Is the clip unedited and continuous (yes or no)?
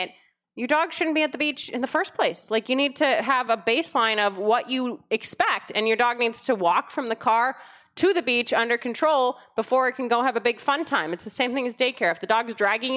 yes